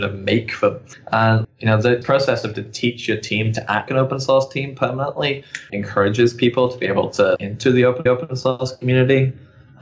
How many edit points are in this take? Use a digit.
8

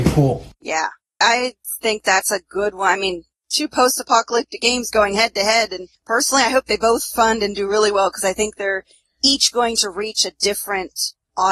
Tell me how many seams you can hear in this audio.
0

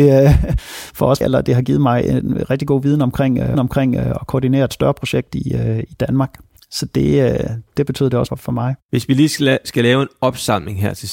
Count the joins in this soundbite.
5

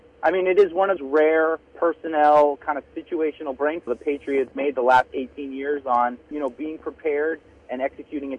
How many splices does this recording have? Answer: 5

